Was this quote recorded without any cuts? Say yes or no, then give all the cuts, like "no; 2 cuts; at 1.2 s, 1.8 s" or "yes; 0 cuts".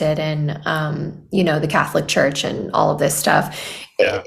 yes; 0 cuts